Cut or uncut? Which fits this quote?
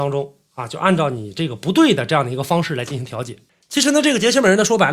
cut